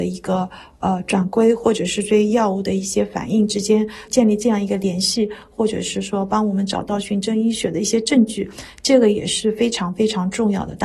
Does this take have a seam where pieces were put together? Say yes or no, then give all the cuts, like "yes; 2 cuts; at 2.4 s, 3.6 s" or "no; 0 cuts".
no; 0 cuts